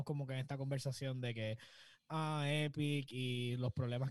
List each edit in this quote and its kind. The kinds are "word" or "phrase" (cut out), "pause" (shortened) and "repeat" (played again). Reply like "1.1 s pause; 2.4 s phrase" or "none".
none